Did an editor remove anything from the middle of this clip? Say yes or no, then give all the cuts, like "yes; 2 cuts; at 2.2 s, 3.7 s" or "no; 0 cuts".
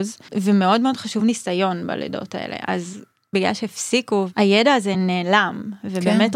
no; 0 cuts